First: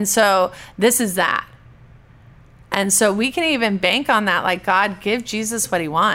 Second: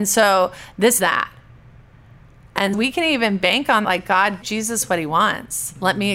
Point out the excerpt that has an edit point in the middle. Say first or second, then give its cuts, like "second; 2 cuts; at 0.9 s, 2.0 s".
second; 4 cuts; at 1.0 s, 2.7 s, 3.8 s, 4.4 s